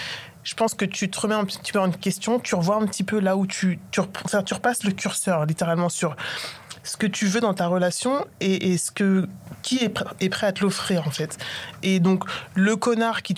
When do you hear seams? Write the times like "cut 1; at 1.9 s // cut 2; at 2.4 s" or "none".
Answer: none